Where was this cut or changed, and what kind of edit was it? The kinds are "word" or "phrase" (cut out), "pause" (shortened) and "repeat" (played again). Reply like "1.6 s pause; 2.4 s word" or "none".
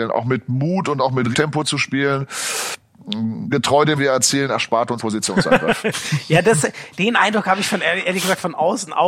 1.3 s word; 3.5 s phrase; 4.0 s phrase; 5.0 s word